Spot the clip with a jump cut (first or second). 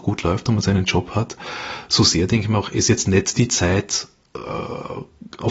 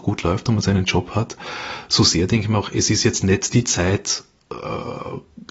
first